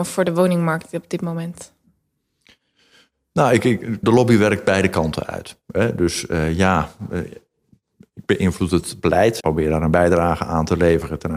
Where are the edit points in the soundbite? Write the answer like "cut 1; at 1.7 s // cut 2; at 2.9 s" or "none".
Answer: cut 1; at 4.0 s // cut 2; at 9.4 s